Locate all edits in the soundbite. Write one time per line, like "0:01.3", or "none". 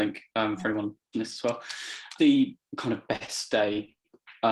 0:01.1
0:02.2